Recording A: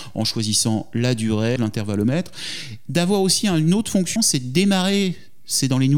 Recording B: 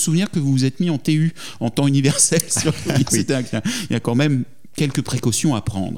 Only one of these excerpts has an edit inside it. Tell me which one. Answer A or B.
A